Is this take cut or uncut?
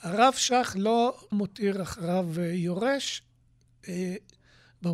cut